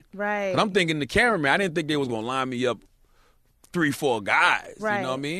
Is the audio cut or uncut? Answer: uncut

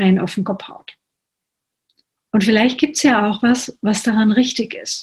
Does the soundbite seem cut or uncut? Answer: uncut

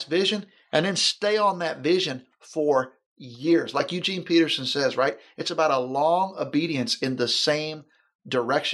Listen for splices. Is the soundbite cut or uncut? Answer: uncut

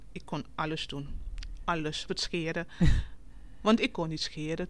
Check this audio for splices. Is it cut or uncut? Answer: cut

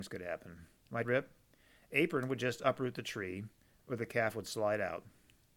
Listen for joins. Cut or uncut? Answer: cut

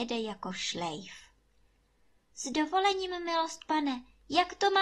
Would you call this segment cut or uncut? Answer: uncut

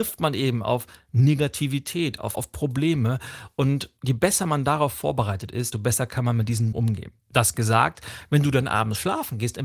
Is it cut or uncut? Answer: cut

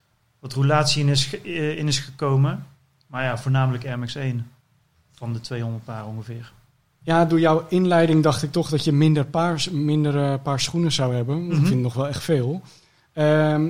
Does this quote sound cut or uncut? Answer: uncut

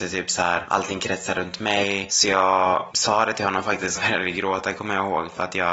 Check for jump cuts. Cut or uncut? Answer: cut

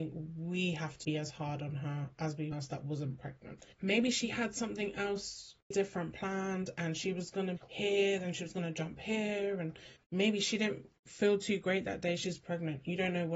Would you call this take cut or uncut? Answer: cut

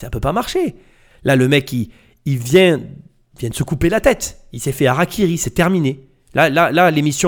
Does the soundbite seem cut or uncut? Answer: uncut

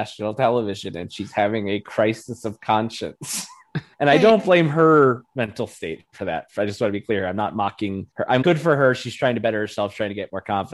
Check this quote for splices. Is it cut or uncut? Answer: cut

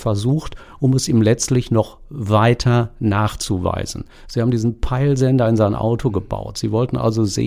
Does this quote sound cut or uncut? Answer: uncut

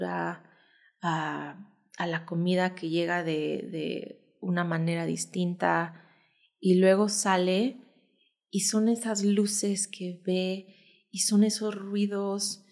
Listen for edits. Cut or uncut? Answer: uncut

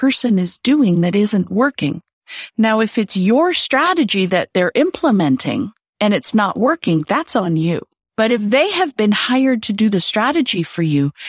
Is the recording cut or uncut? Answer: uncut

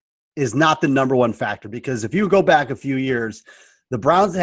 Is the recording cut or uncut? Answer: uncut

